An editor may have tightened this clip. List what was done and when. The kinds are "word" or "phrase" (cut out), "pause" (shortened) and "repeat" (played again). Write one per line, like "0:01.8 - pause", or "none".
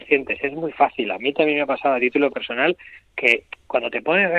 none